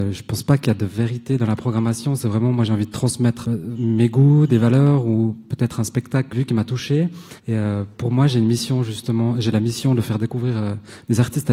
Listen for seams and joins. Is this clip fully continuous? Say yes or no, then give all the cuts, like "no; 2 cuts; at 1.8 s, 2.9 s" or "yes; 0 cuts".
no; 4 cuts; at 3.4 s, 6.3 s, 7.4 s, 7.9 s